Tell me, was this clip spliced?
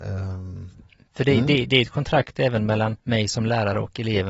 yes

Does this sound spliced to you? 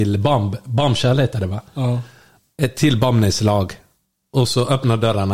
no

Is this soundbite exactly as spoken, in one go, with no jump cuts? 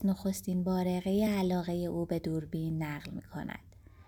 yes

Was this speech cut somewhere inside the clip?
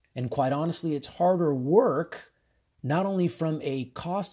no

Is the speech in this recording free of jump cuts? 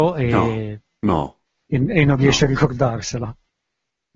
yes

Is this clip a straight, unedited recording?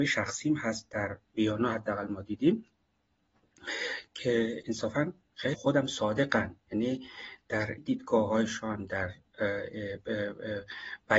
no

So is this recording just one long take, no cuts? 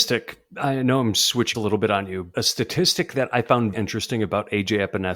no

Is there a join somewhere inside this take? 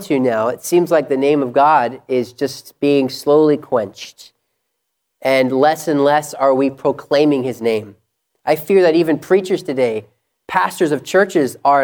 no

